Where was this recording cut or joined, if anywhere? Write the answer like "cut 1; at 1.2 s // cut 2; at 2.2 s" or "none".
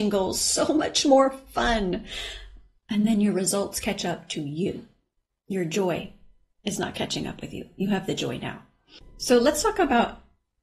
none